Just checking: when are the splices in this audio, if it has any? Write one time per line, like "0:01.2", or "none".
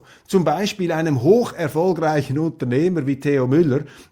none